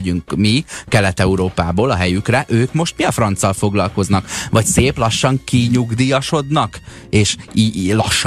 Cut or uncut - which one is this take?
uncut